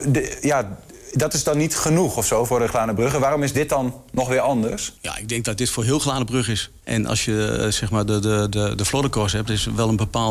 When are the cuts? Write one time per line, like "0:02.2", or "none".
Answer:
0:05.0
0:06.8